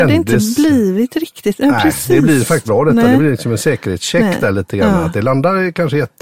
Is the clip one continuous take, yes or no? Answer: no